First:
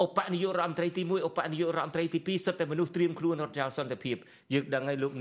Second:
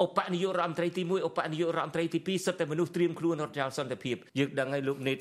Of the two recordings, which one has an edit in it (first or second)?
second